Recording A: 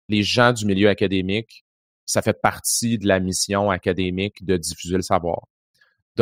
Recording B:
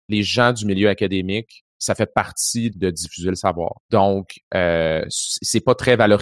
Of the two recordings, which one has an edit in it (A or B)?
B